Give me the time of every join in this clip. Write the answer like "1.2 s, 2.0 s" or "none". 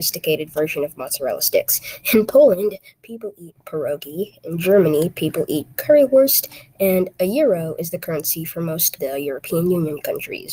9.0 s